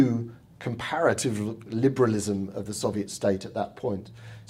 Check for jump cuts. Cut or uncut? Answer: uncut